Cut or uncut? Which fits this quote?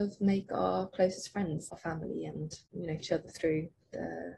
cut